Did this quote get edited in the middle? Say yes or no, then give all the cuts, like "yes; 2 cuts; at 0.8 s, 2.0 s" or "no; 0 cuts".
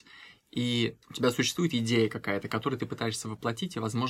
yes; 1 cut; at 1.0 s